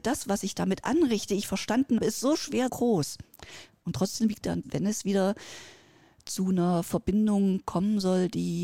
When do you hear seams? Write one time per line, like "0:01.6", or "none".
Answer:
0:02.0
0:02.7
0:04.6